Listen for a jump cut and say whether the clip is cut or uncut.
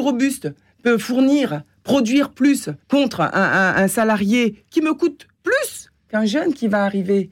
cut